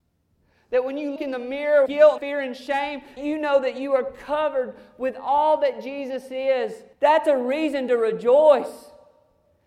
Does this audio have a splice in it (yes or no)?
yes